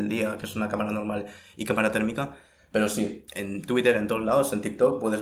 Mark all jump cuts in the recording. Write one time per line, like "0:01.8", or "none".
none